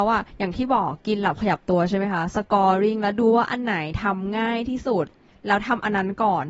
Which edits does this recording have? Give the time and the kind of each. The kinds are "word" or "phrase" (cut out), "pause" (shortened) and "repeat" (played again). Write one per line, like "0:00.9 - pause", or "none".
0:05.3 - pause